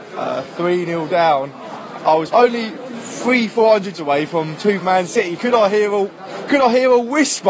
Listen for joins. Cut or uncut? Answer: cut